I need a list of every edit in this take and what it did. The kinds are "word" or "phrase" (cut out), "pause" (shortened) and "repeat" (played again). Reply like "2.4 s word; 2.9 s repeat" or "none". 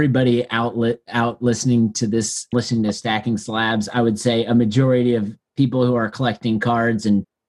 2.5 s phrase